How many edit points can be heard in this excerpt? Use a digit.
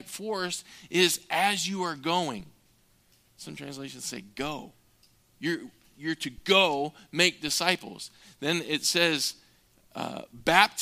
0